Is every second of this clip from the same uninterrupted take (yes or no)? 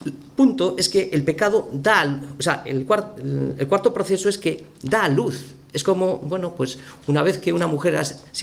yes